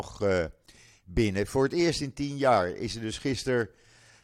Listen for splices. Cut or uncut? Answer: uncut